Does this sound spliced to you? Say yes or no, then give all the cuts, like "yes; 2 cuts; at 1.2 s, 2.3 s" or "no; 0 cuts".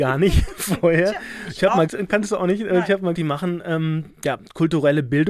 yes; 2 cuts; at 1.9 s, 3.1 s